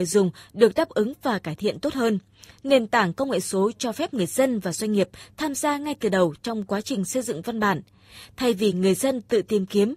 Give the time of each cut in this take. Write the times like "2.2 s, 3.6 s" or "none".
none